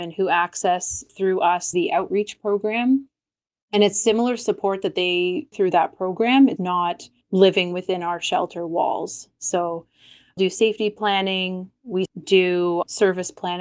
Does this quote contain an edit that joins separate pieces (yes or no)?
yes